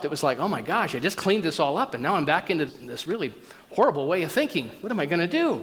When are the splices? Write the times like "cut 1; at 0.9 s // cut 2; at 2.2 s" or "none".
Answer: cut 1; at 2.7 s